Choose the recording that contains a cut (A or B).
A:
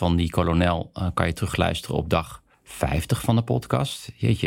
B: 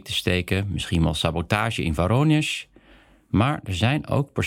A